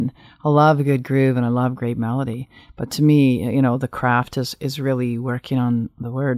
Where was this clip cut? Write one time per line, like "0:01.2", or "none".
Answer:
none